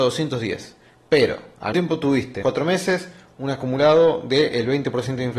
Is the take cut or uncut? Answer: cut